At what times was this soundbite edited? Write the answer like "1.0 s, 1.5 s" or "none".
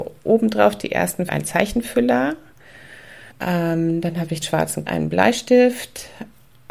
1.3 s, 3.3 s, 4.4 s, 4.9 s